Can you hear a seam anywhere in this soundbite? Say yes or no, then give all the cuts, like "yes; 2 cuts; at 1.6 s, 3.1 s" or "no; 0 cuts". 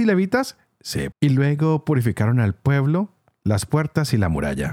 yes; 1 cut; at 1.1 s